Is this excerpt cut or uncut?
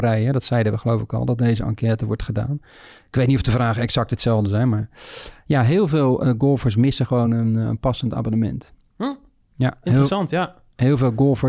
uncut